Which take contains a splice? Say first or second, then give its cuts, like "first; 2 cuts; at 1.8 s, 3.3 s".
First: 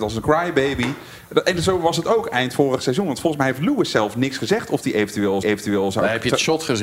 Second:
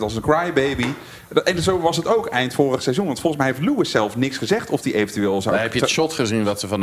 first; 1 cut; at 5.4 s